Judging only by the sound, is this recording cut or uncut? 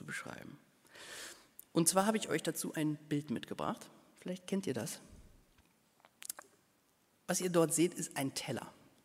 uncut